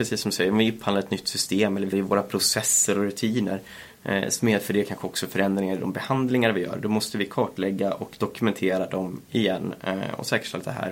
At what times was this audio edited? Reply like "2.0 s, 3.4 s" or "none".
1.9 s